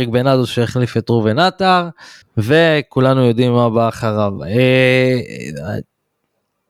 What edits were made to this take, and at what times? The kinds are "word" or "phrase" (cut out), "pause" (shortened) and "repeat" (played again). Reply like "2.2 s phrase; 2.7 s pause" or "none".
2.2 s pause